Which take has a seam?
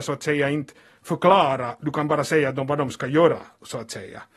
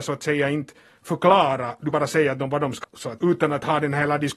second; 3 cuts; at 1.9 s, 2.8 s, 3.2 s

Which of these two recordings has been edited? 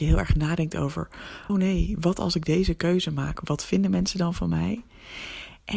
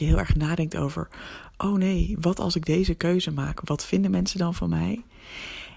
first; 1 cut; at 1.5 s

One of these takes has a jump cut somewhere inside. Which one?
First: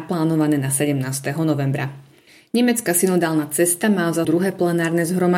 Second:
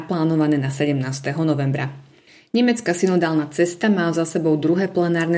first; 1 cut; at 4.2 s

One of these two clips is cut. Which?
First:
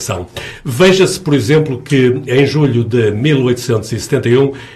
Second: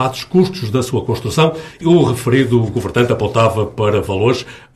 second; 1 cut; at 1.8 s

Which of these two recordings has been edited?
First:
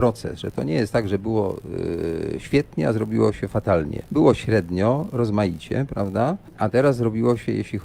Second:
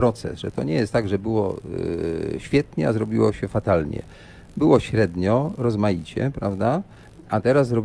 first; 2 cuts; at 4.1 s, 6.5 s

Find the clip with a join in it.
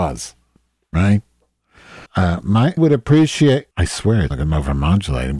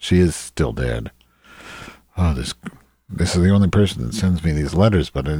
first; 4 cuts; at 2.1 s, 2.8 s, 3.7 s, 4.3 s

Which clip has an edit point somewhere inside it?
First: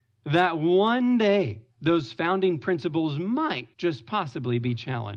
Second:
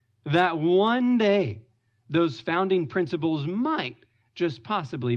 first; 2 cuts; at 1.7 s, 3.7 s

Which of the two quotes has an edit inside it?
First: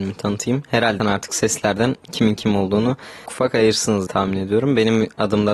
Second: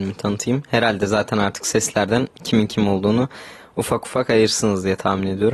first; 3 cuts; at 1.0 s, 3.3 s, 4.1 s

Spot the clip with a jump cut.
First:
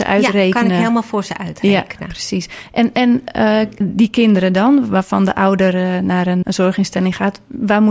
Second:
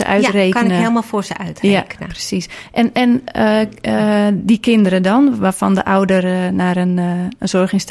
first; 2 cuts; at 3.8 s, 6.4 s

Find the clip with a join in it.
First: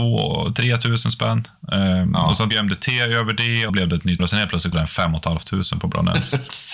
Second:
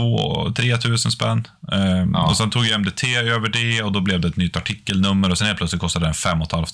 first; 4 cuts; at 2.5 s, 3.7 s, 4.2 s, 4.7 s

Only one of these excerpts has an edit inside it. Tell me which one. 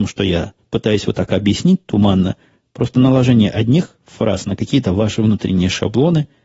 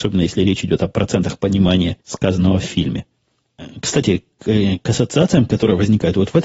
second; 1 cut; at 2.0 s

